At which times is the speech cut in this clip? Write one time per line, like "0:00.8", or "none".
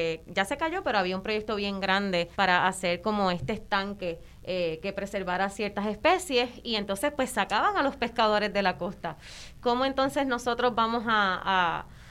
0:02.3